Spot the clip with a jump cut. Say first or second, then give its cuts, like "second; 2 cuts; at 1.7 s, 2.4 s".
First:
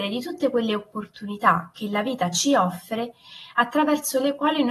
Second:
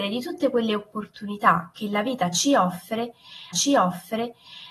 second; 1 cut; at 3.5 s